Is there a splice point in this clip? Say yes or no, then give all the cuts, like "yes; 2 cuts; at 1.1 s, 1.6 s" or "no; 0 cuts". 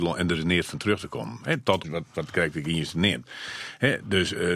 yes; 1 cut; at 1.8 s